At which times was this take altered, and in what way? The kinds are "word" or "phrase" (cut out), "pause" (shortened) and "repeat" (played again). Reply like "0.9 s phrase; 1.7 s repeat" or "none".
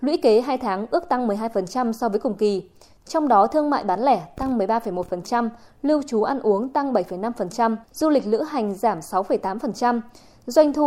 7.8 s pause